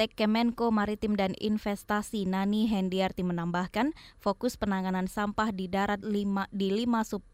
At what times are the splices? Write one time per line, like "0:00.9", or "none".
0:06.0